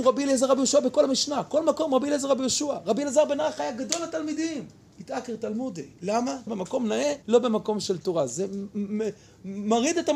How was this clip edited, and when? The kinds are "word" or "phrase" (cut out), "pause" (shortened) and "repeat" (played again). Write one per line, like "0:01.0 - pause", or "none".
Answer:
0:04.8 - pause
0:06.5 - phrase
0:07.2 - pause